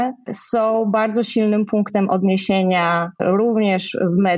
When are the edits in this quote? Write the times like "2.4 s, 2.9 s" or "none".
none